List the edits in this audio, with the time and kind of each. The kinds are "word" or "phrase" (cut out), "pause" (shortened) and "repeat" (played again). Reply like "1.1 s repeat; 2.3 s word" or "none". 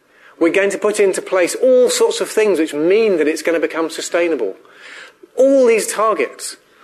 none